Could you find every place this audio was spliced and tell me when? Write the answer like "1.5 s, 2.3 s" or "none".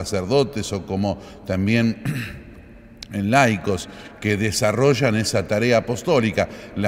none